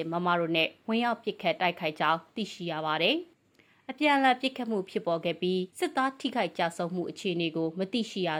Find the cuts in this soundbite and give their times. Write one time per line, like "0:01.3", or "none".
0:03.3
0:05.7

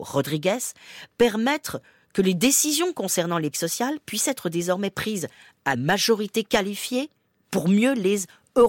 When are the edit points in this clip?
0:03.5
0:05.7

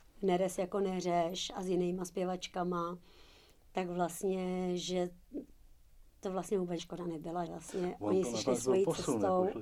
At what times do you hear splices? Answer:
0:06.8
0:07.5

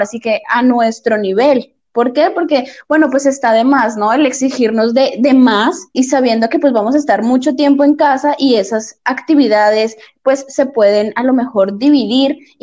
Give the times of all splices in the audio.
0:05.9

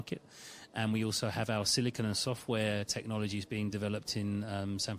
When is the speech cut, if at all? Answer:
none

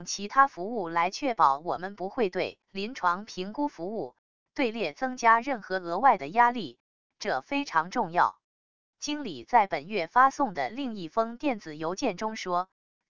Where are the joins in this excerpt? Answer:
0:02.6
0:08.5

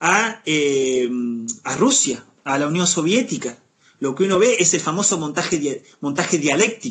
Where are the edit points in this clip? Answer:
none

